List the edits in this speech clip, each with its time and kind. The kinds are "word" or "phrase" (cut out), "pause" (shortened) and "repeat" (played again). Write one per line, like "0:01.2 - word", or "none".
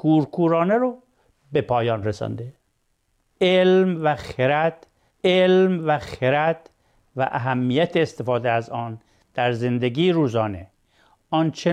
0:05.1 - repeat

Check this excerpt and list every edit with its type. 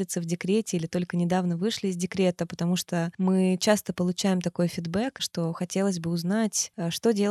none

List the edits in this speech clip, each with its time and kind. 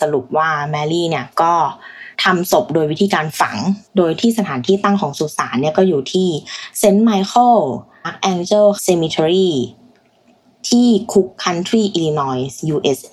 0:02.1 - pause
0:03.9 - pause
0:08.0 - word
0:08.8 - word

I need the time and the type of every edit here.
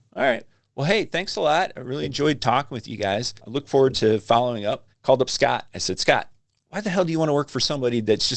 0:03.4 - pause
0:04.9 - pause
0:06.4 - pause

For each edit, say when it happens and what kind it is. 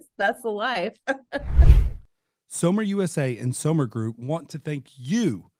none

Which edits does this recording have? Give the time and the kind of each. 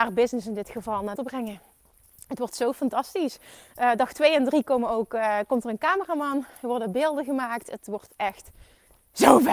0:01.2 - phrase

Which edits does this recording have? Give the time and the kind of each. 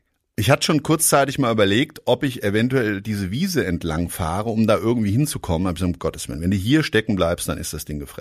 none

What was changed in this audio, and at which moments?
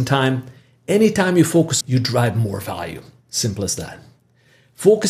0:01.8 - phrase

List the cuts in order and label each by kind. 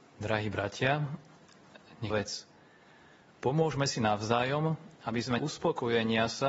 0:02.1 - phrase
0:04.9 - pause
0:05.4 - phrase

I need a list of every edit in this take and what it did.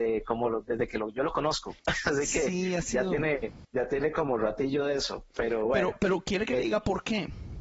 0:01.8 - pause

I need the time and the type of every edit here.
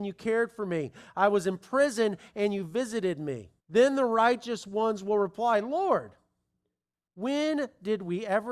0:03.6 - pause

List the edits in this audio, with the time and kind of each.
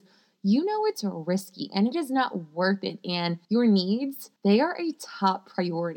0:03.4 - pause
0:04.4 - pause

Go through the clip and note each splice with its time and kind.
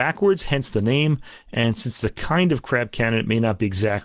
none

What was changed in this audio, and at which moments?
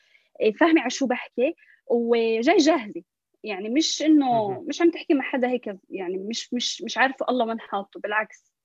none

